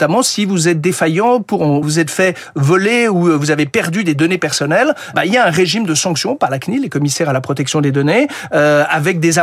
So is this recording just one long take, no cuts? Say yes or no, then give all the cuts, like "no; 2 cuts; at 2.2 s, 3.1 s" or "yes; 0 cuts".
no; 2 cuts; at 1.8 s, 5.1 s